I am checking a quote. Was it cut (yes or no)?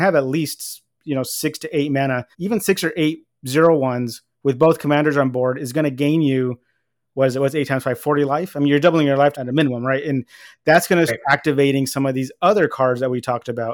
yes